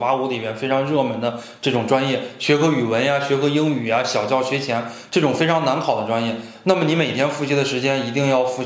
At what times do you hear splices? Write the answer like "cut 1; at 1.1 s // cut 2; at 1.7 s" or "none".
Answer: none